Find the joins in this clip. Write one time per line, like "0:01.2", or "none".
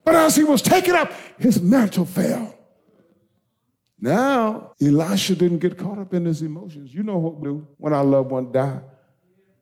0:04.7
0:07.4
0:07.7